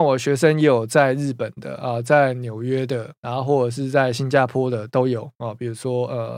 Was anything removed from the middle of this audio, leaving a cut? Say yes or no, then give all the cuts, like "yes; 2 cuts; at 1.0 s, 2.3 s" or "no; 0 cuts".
yes; 2 cuts; at 3.2 s, 5.3 s